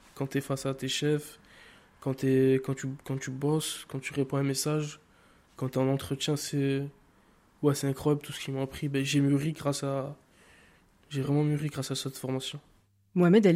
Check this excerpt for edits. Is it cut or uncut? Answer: uncut